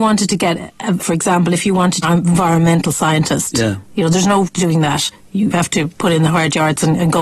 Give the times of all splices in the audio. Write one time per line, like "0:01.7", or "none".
0:01.0
0:02.0
0:04.5
0:05.5